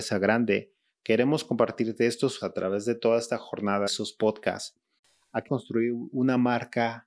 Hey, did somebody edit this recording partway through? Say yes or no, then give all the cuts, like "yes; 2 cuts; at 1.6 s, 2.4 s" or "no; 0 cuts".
yes; 4 cuts; at 2.4 s, 3.9 s, 5.0 s, 5.5 s